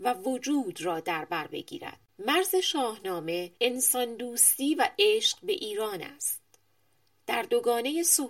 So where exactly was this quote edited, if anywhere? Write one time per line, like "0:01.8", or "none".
0:02.1
0:03.6